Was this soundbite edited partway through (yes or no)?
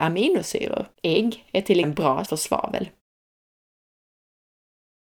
yes